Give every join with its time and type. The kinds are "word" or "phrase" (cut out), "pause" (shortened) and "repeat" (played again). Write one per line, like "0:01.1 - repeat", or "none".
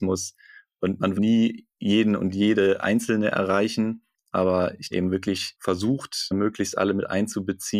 0:01.2 - word
0:01.7 - pause
0:04.9 - phrase